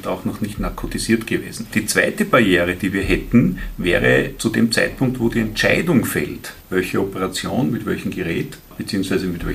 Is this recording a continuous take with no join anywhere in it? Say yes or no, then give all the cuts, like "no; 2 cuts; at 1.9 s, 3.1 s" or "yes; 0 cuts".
yes; 0 cuts